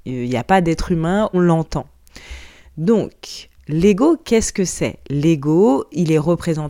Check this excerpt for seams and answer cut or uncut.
cut